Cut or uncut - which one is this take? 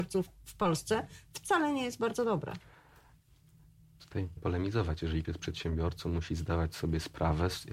cut